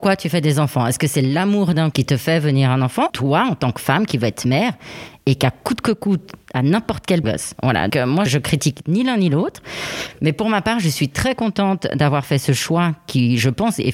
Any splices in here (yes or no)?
yes